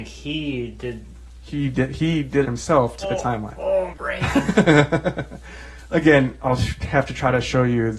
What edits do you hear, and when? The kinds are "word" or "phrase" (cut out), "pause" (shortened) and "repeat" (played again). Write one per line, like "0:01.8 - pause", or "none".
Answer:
0:02.4 - word
0:03.0 - word
0:03.9 - word
0:06.4 - word